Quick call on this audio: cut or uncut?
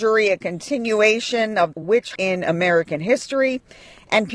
cut